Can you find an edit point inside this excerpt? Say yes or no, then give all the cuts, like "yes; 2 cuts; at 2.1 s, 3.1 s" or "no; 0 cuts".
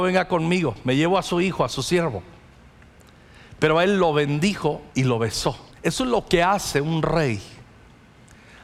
yes; 2 cuts; at 4.9 s, 5.7 s